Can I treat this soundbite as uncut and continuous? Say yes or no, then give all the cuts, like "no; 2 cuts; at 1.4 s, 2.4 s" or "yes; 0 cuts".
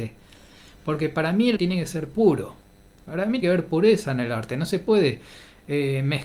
no; 2 cuts; at 1.6 s, 3.4 s